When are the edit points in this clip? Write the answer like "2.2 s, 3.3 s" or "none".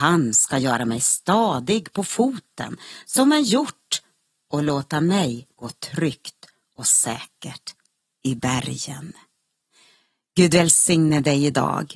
5.5 s